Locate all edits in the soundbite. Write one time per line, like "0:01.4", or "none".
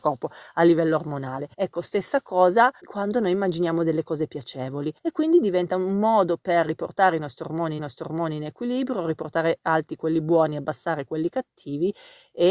0:01.5
0:02.8
0:05.0
0:07.8